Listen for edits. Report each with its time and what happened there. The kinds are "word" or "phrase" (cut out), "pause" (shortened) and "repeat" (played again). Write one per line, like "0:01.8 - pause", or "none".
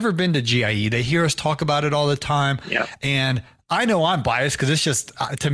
none